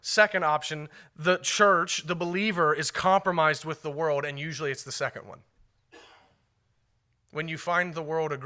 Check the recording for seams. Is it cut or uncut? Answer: uncut